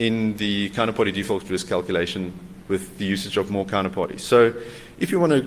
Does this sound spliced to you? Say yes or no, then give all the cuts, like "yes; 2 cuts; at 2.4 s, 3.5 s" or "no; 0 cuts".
no; 0 cuts